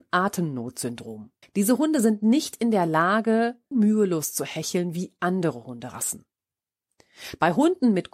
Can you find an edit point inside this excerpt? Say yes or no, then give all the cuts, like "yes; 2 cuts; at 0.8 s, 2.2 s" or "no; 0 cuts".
yes; 2 cuts; at 1.4 s, 3.7 s